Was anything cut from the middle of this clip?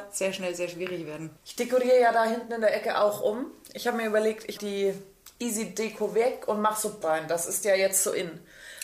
yes; 3 cuts; at 1.4 s, 4.6 s, 7.0 s

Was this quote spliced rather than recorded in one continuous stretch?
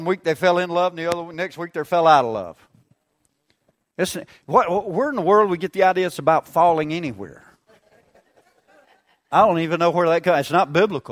no; 0 cuts

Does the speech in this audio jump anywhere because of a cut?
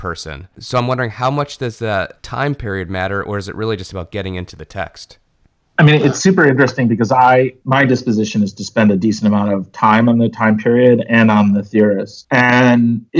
no; 0 cuts

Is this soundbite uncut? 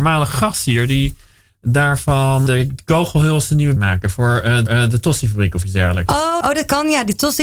no; 4 cuts; at 2.5 s, 3.8 s, 4.7 s, 6.4 s

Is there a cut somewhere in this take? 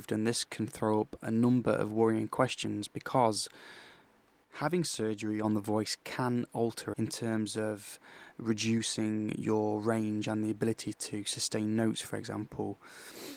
yes; 1 cut; at 6.9 s

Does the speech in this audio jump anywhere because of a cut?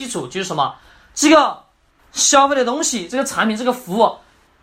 yes; 1 cut; at 2.0 s

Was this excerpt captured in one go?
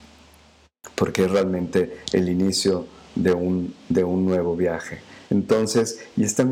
no; 1 cut; at 5.3 s

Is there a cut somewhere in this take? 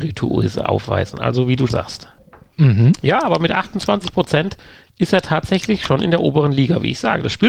yes; 1 cut; at 1.7 s

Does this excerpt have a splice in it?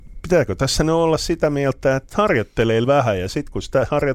yes; 2 cuts; at 2.1 s, 2.8 s

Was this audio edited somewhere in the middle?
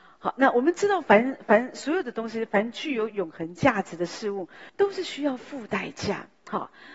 yes; 1 cut; at 4.7 s

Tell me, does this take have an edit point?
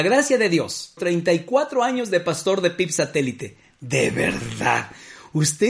yes; 1 cut; at 1.0 s

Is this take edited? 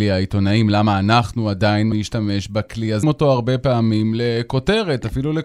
yes; 2 cuts; at 1.9 s, 3.0 s

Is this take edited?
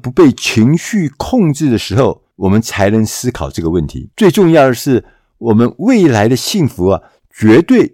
yes; 2 cuts; at 2.3 s, 4.1 s

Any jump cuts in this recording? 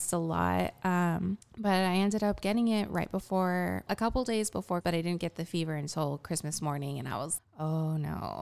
yes; 4 cuts; at 1.4 s, 3.9 s, 4.8 s, 7.4 s

